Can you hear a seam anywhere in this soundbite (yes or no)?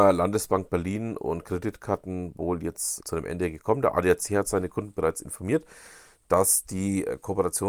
yes